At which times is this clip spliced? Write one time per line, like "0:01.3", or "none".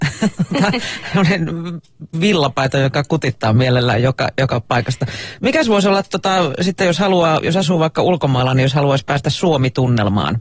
none

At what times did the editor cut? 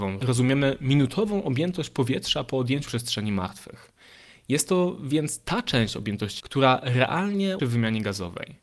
0:02.9
0:06.4
0:07.6

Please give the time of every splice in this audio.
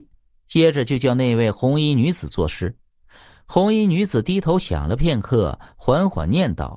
none

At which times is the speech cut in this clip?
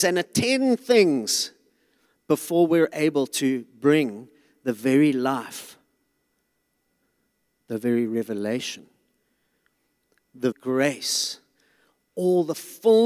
0:10.5

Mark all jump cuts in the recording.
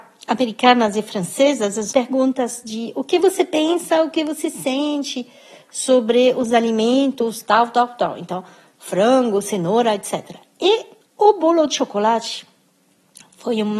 0:01.9
0:11.0

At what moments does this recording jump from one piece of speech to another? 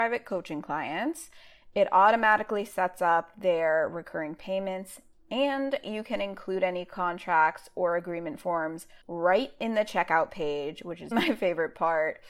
0:09.0
0:11.1

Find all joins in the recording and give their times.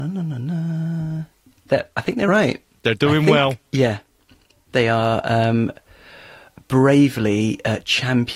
0:02.3

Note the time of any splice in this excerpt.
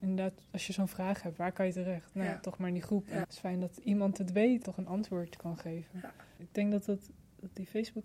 0:03.2
0:04.6
0:06.4

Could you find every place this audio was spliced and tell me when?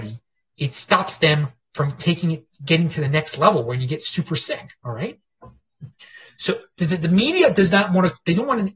none

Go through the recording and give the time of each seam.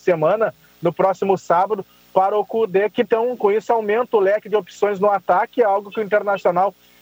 none

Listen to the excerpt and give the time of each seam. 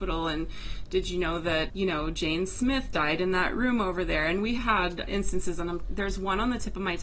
0:01.7
0:04.6
0:05.0

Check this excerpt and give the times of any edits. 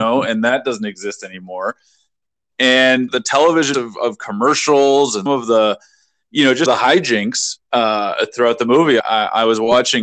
0:03.1
0:03.7
0:05.3
0:06.7
0:07.6
0:09.0

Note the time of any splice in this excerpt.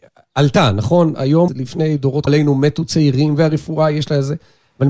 0:01.5
0:02.3

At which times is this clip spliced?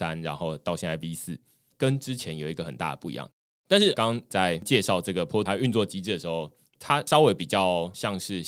0:05.5

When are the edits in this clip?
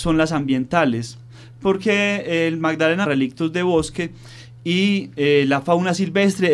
0:03.0

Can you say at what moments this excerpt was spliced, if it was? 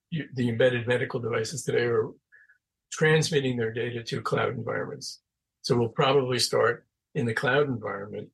none

